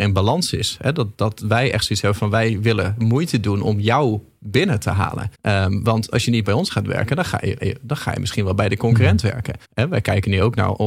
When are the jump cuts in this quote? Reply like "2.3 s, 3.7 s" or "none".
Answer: 1.1 s, 5.3 s, 7.6 s, 9.6 s